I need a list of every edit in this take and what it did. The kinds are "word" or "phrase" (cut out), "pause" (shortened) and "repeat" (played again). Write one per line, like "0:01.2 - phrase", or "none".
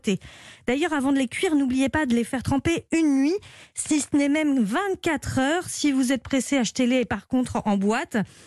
none